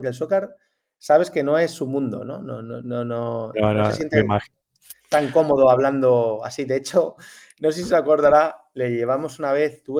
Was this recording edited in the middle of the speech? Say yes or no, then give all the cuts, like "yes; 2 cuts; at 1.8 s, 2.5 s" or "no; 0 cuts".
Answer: yes; 1 cut; at 3.5 s